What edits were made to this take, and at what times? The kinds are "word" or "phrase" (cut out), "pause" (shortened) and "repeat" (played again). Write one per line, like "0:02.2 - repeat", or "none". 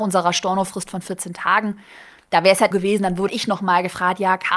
0:02.7 - phrase
0:03.3 - word